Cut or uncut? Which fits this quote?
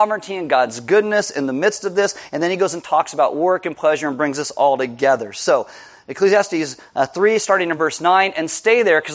uncut